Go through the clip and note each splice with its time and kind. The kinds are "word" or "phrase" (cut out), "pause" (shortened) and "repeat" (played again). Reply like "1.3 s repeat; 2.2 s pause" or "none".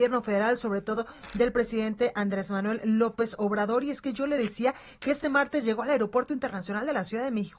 none